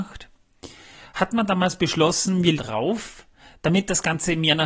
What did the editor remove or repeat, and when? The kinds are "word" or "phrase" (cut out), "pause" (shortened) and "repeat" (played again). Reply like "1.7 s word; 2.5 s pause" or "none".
2.5 s phrase